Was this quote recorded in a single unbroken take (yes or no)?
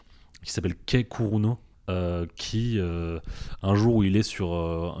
no